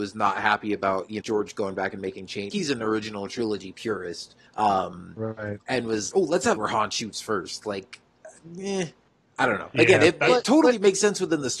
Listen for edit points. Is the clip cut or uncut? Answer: cut